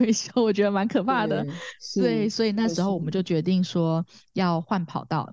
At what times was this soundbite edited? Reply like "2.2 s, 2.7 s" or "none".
none